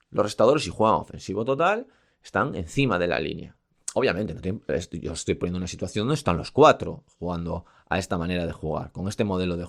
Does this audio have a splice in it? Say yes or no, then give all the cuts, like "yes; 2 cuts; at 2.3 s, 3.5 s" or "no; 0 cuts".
no; 0 cuts